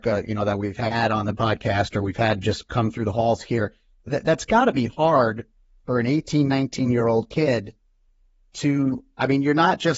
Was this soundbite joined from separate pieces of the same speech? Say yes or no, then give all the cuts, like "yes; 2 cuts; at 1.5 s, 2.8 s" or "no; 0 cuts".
no; 0 cuts